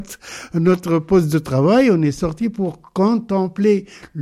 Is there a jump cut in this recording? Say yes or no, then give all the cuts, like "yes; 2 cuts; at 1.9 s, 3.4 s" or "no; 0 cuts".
no; 0 cuts